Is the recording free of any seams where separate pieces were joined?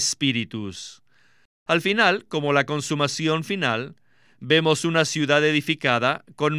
yes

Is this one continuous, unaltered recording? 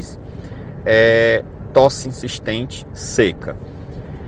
no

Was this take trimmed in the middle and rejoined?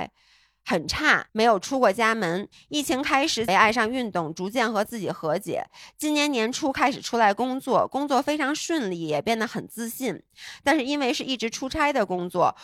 yes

